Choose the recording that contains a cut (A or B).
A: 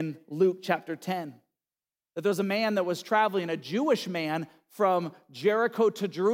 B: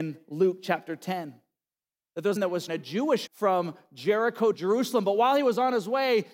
B